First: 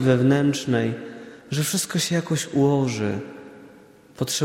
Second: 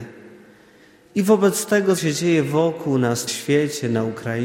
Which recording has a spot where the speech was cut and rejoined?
second; 2 cuts; at 2.0 s, 3.3 s

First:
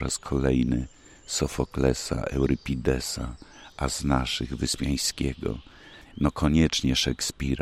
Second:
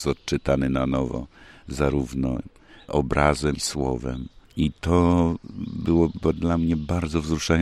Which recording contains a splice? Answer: second; 2 cuts; at 3.5 s, 4.5 s

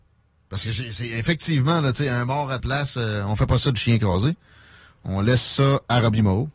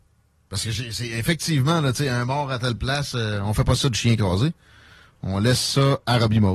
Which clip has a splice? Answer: first; 1 cut; at 2.6 s

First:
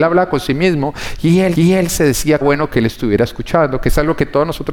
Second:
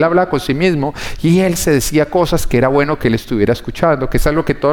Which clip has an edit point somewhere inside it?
first; 2 cuts; at 1.5 s, 2.4 s

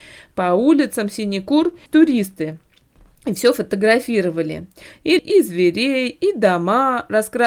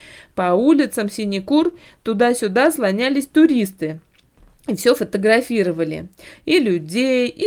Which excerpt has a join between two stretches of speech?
first; 2 cuts; at 1.9 s, 5.2 s

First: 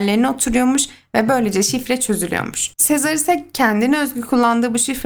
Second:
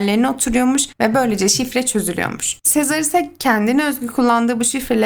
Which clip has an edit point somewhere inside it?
second; 1 cut; at 0.9 s

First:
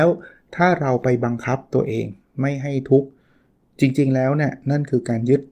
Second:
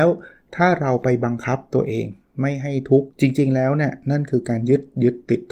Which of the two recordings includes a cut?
second; 1 cut; at 3.1 s

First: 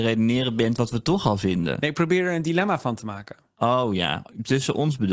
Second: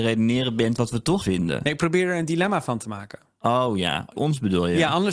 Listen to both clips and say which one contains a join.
second; 2 cuts; at 1.2 s, 4.2 s

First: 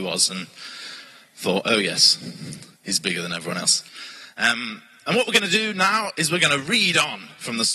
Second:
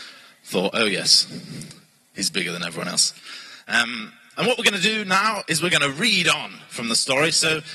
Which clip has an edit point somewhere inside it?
first; 1 cut; at 2.7 s

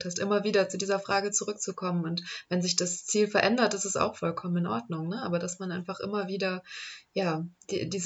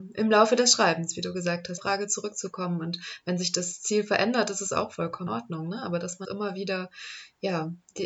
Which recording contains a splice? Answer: second; 3 cuts; at 1.8 s, 5.3 s, 6.2 s

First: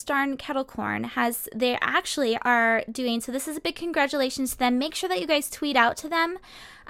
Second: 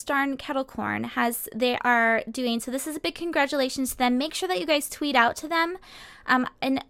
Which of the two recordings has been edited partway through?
second; 1 cut; at 1.8 s

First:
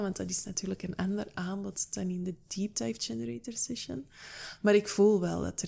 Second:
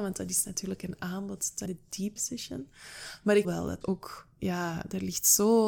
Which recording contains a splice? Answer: second; 5 cuts; at 1.0 s, 1.7 s, 2.2 s, 3.4 s, 3.8 s

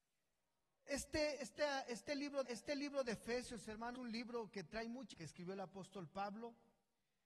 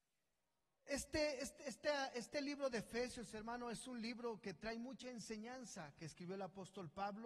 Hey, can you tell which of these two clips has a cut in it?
first; 4 cuts; at 1.4 s, 2.4 s, 3.9 s, 5.1 s

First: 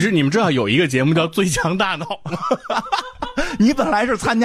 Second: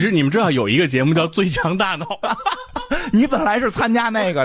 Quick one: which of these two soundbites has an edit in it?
second; 1 cut; at 2.2 s

